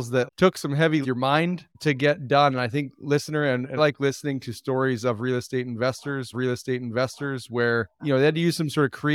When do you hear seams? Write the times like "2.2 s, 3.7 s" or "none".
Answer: 1.0 s, 1.7 s, 3.8 s, 6.3 s